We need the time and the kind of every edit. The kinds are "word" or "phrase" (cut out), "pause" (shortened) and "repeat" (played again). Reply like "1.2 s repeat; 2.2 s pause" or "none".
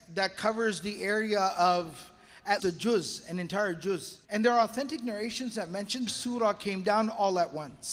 2.6 s word; 4.2 s pause; 6.1 s phrase